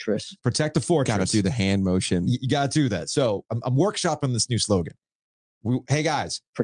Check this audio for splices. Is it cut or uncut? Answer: uncut